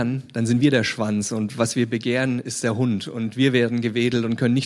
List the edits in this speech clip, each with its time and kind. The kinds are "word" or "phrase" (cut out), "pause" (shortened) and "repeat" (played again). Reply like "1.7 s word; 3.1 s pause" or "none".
none